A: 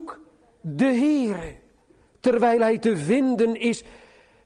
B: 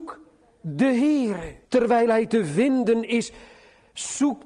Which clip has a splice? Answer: B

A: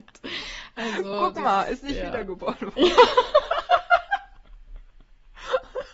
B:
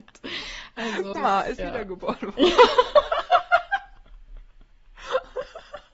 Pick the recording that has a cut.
B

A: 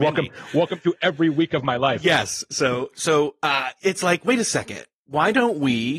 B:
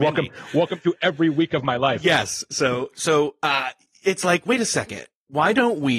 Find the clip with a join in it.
A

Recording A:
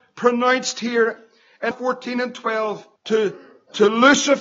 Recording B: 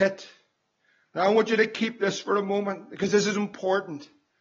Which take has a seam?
A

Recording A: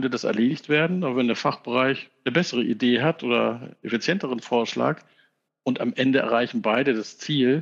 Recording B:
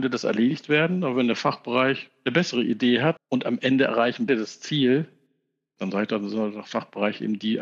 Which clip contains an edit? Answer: B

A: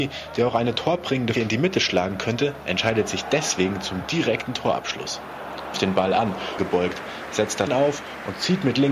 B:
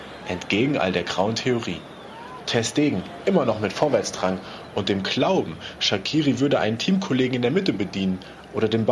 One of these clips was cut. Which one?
A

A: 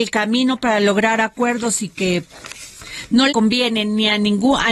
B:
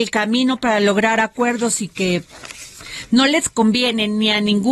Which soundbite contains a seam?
A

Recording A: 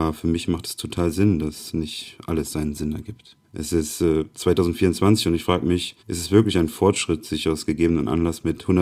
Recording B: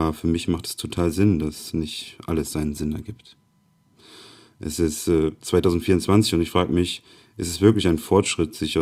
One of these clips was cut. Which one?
A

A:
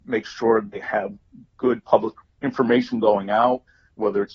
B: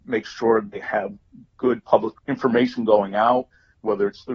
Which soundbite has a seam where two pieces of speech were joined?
B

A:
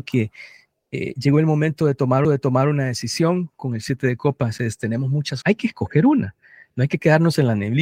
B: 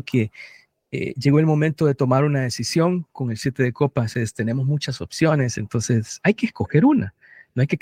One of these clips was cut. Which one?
A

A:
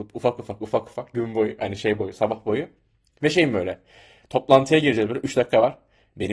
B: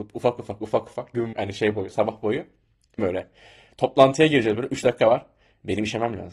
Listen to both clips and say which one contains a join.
B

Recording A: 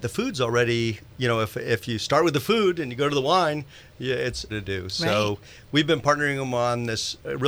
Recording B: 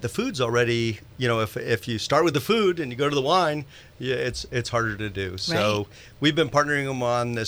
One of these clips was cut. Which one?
A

